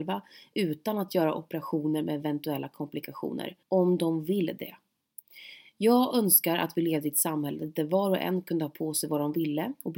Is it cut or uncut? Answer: cut